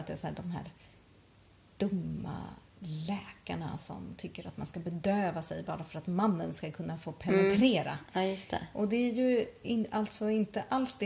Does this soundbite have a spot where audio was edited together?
no; 0 cuts

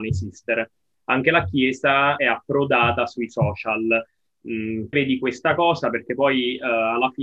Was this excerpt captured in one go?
no; 2 cuts; at 2.2 s, 4.9 s

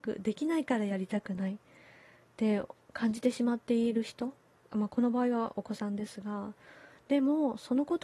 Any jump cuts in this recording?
no; 0 cuts

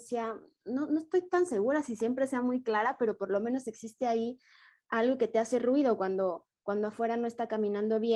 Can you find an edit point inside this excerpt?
no; 0 cuts

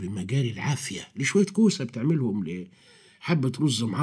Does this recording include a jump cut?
no; 0 cuts

